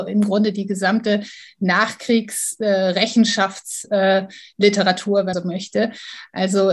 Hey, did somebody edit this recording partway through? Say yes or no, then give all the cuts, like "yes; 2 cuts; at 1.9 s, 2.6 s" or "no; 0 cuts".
yes; 1 cut; at 5.3 s